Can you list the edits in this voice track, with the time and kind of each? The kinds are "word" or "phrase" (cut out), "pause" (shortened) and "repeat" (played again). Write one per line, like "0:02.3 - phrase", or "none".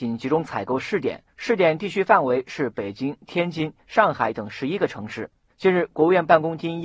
none

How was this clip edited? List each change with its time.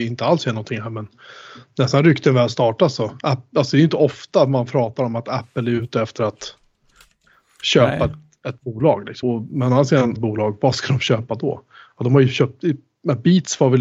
0:09.2 - word
0:10.2 - phrase

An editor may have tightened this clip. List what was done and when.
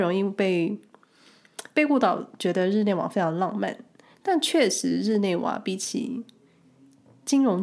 none

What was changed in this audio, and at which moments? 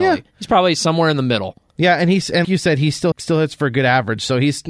0:02.4 - word
0:03.1 - phrase

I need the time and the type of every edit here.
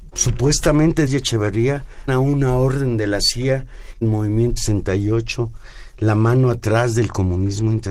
0:01.1 - phrase
0:02.1 - word
0:04.0 - phrase
0:04.6 - word

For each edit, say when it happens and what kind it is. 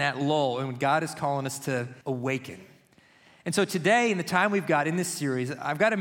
0:02.0 - pause

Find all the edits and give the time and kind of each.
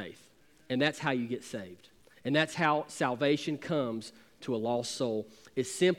none

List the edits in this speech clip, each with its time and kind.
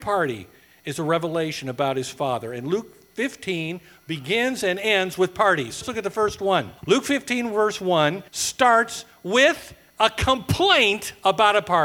0:05.8 - word
0:06.8 - pause
0:08.3 - pause

